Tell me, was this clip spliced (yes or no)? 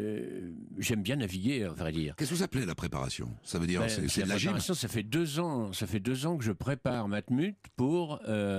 no